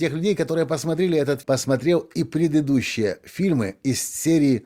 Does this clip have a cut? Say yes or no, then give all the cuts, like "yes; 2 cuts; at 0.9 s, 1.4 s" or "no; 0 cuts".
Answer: yes; 1 cut; at 1.4 s